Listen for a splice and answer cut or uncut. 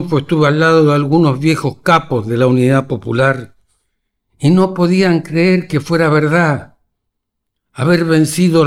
uncut